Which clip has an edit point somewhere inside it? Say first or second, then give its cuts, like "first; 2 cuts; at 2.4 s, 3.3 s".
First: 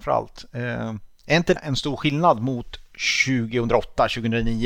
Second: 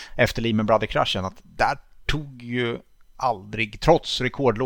first; 1 cut; at 1.6 s